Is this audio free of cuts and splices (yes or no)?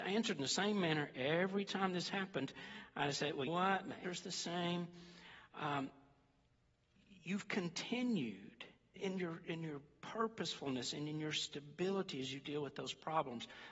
no